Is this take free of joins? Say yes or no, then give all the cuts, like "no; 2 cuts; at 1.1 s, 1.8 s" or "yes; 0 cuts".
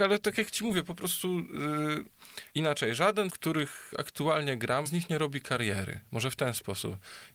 no; 3 cuts; at 2.5 s, 3.3 s, 4.9 s